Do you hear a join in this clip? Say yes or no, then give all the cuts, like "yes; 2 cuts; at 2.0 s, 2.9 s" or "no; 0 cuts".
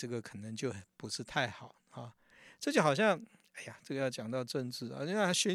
no; 0 cuts